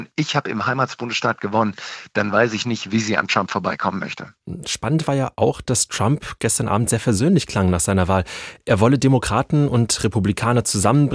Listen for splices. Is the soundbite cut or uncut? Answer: uncut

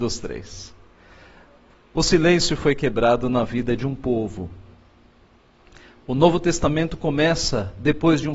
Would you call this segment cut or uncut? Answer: uncut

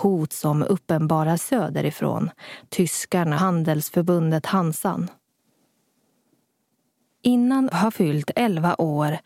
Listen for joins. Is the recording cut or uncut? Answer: cut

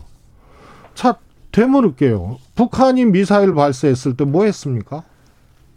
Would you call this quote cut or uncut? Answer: uncut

